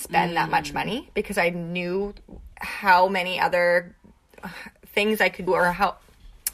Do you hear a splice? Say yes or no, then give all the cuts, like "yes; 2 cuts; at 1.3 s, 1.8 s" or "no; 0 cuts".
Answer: yes; 2 cuts; at 2.5 s, 5.5 s